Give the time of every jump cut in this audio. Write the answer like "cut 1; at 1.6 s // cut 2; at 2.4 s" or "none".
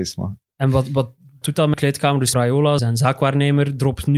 cut 1; at 1.4 s // cut 2; at 1.7 s // cut 3; at 2.3 s // cut 4; at 2.8 s